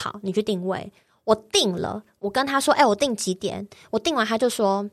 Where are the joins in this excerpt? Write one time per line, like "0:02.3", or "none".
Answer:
none